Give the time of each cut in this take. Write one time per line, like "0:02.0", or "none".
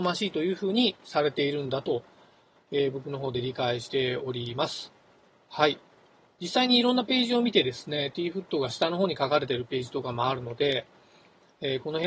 none